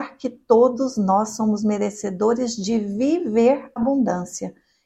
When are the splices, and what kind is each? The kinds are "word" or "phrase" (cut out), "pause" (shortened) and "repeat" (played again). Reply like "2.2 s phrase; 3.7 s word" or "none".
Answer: 3.8 s word